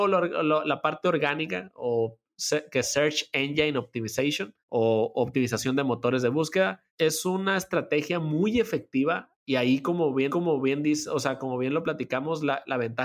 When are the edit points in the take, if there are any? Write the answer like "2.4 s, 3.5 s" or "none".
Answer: 2.8 s, 4.6 s, 6.9 s, 9.3 s, 10.3 s